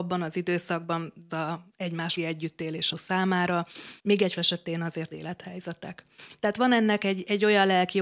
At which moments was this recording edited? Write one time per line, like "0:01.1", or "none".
0:01.3
0:02.2
0:02.9
0:04.0
0:04.4
0:05.1